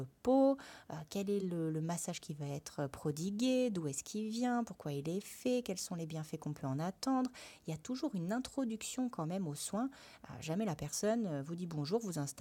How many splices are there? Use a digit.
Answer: 0